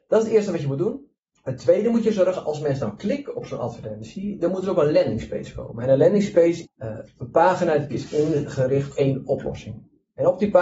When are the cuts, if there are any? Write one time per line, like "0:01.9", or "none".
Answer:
0:01.3
0:06.6
0:07.9
0:08.9